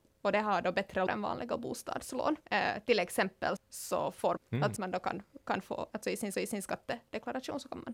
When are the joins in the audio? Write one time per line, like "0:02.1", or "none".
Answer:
0:01.1
0:02.4
0:03.6
0:04.4
0:04.8
0:06.3